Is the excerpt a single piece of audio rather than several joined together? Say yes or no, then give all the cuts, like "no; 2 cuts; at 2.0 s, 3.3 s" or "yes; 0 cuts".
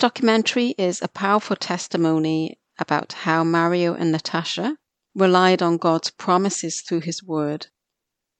yes; 0 cuts